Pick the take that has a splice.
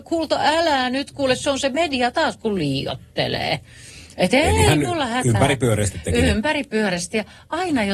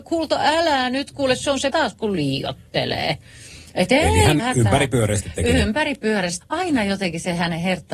second; 3 cuts; at 1.7 s, 4.4 s, 6.4 s

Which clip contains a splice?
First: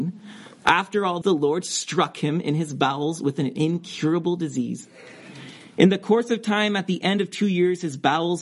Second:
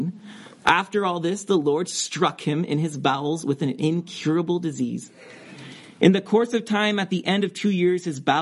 first; 1 cut; at 1.2 s

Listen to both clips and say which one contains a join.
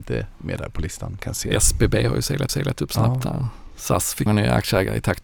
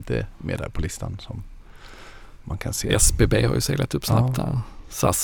first; 3 cuts; at 1.2 s, 2.5 s, 4.3 s

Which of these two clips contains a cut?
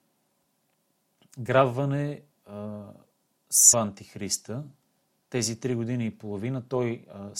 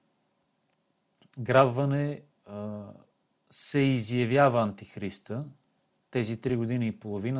first; 1 cut; at 3.7 s

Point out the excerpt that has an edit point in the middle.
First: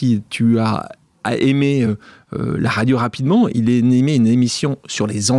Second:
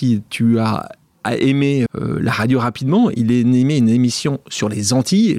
second; 1 cut; at 1.9 s

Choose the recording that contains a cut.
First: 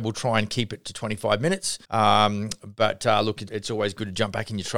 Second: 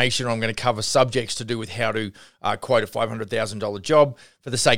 first; 2 cuts; at 1.8 s, 3.5 s

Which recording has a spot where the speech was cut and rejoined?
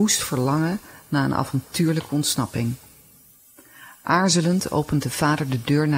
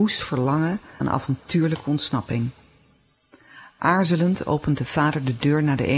second; 1 cut; at 1.0 s

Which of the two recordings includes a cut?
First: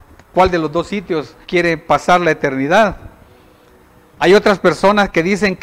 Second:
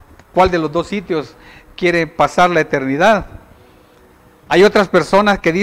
first; 1 cut; at 1.4 s

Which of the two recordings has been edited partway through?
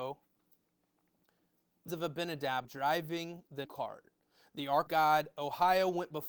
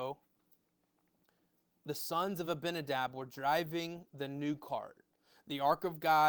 first; 4 cuts; at 1.9 s, 2.6 s, 3.6 s, 4.9 s

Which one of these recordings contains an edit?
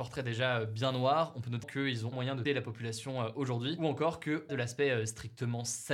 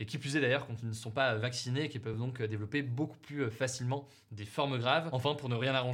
first; 4 cuts; at 1.6 s, 2.1 s, 2.4 s, 4.5 s

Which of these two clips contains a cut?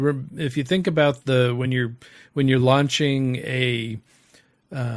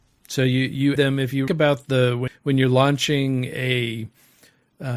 second; 3 cuts; at 1.0 s, 1.5 s, 2.3 s

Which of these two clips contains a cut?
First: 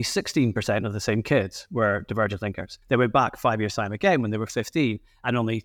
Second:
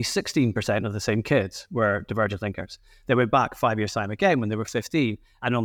first; 1 cut; at 2.8 s

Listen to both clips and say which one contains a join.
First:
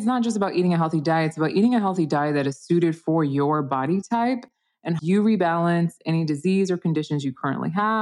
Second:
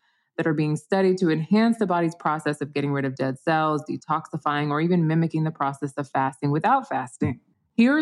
first; 1 cut; at 5.0 s

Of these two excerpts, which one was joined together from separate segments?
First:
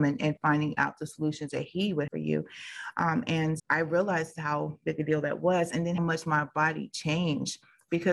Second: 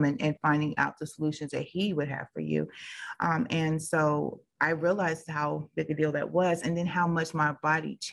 first; 3 cuts; at 2.1 s, 3.6 s, 6.0 s

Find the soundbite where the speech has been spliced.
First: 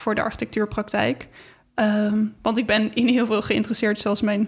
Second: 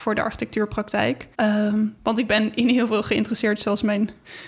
second; 1 cut; at 1.3 s

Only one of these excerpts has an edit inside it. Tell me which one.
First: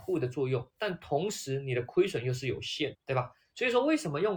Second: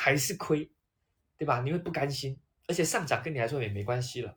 first; 1 cut; at 2.9 s

